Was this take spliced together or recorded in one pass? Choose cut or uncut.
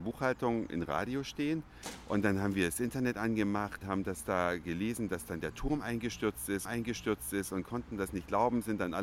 cut